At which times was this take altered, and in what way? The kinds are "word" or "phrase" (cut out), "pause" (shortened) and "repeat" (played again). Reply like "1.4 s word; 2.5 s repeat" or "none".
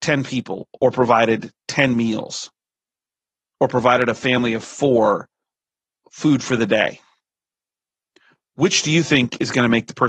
none